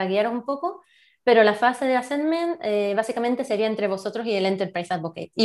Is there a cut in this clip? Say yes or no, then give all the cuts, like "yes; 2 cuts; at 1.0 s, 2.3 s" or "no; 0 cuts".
no; 0 cuts